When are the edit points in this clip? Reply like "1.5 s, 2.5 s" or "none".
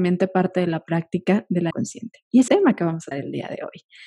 1.7 s, 2.5 s, 3.1 s